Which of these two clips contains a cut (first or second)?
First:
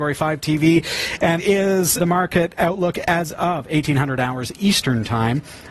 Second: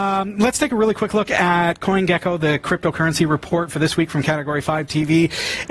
first